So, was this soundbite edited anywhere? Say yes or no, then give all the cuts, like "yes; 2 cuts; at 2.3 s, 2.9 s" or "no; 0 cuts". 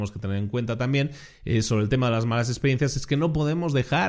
no; 0 cuts